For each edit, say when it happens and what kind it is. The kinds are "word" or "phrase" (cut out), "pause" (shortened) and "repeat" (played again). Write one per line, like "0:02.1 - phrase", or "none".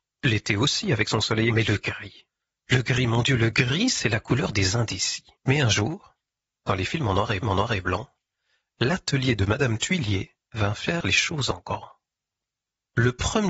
0:01.5 - word
0:03.5 - phrase
0:05.4 - pause
0:07.4 - repeat
0:10.4 - pause